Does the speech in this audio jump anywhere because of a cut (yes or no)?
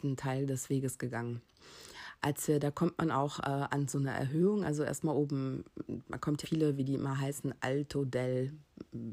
yes